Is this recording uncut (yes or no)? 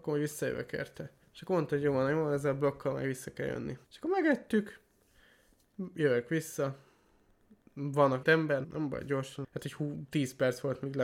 no